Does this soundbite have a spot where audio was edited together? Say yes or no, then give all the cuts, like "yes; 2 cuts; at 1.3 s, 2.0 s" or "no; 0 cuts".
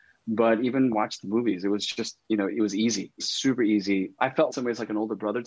yes; 3 cuts; at 2.2 s, 3.2 s, 4.5 s